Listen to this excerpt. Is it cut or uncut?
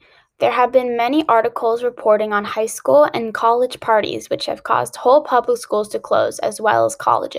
uncut